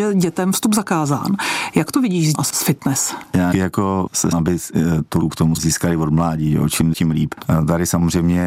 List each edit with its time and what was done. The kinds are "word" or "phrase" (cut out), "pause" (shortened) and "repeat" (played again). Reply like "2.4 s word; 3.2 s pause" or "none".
2.3 s word; 3.5 s word; 4.3 s word; 5.2 s word; 5.6 s word; 6.9 s word